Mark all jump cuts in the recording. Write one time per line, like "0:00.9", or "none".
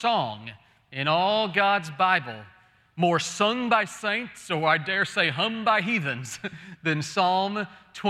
none